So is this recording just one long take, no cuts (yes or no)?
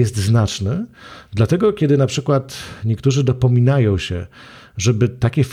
yes